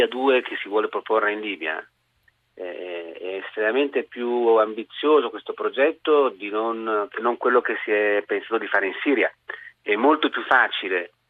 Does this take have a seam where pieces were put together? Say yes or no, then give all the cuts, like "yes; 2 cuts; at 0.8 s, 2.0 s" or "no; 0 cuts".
no; 0 cuts